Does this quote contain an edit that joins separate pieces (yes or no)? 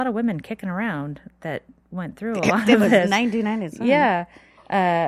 no